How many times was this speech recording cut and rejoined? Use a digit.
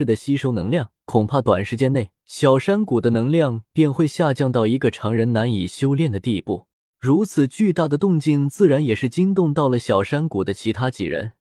3